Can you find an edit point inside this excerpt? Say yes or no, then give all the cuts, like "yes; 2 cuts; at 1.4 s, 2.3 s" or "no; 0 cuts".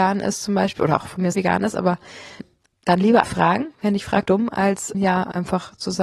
yes; 5 cuts; at 1.3 s, 2.4 s, 3.2 s, 4.3 s, 4.9 s